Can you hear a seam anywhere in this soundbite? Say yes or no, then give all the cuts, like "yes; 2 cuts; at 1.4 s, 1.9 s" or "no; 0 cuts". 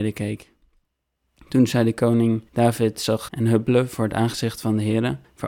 yes; 2 cuts; at 2.5 s, 3.3 s